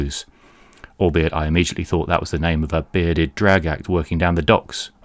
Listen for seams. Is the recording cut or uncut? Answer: uncut